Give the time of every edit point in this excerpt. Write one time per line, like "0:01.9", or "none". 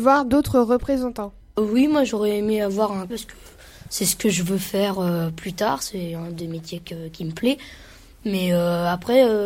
0:01.4
0:03.1